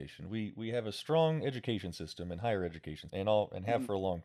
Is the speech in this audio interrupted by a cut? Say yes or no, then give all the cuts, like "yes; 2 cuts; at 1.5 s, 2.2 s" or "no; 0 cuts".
yes; 1 cut; at 3.1 s